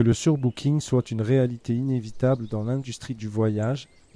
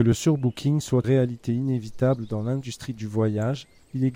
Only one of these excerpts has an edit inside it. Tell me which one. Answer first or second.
second